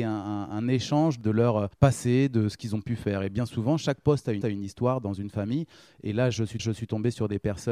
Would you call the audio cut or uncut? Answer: cut